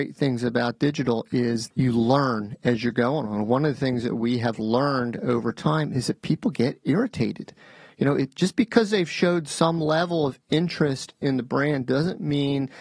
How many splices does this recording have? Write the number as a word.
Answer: one